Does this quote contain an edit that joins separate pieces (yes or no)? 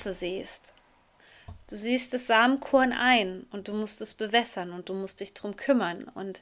no